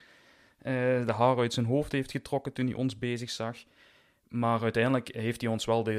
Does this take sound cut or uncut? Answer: uncut